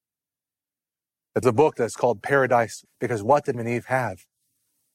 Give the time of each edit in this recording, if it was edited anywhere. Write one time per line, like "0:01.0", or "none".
0:01.4
0:01.7
0:02.8
0:03.5